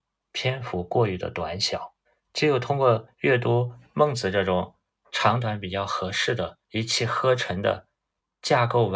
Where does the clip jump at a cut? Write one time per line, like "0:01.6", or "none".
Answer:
0:06.6